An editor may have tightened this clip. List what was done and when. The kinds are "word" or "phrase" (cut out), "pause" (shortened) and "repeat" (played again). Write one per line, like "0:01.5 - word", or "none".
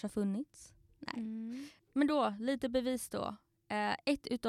none